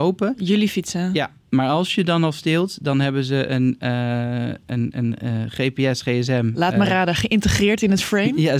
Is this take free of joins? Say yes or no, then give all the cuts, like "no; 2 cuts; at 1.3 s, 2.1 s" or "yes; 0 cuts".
yes; 0 cuts